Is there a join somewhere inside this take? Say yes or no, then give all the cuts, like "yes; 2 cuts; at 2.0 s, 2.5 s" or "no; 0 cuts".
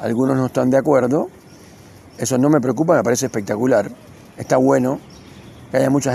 no; 0 cuts